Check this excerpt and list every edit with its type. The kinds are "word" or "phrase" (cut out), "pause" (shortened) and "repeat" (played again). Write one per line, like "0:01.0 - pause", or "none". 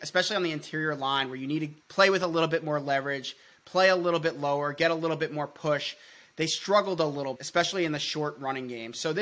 0:01.8 - pause
0:07.4 - word